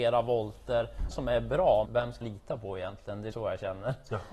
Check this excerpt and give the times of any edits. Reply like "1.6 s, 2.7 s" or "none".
1.1 s, 1.8 s, 2.2 s, 3.3 s